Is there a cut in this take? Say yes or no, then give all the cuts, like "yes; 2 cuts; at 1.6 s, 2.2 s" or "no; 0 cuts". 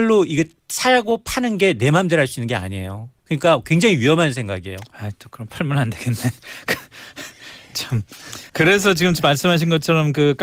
yes; 2 cuts; at 3.2 s, 8.5 s